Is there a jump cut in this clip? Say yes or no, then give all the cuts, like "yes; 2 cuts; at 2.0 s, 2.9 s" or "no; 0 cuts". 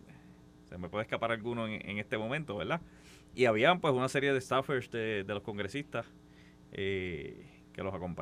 no; 0 cuts